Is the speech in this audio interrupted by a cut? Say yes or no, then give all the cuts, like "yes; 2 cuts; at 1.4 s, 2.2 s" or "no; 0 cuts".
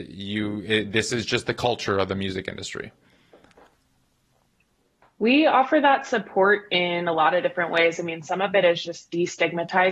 no; 0 cuts